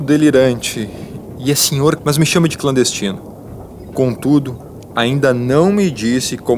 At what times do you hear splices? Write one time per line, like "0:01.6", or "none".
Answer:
0:02.0